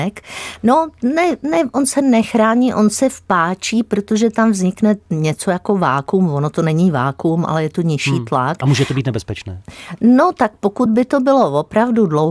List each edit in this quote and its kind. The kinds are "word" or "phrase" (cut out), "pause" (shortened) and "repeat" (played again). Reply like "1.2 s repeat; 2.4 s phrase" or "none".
none